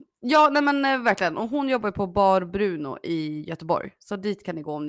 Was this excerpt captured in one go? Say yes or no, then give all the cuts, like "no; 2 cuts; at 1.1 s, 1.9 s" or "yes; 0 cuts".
yes; 0 cuts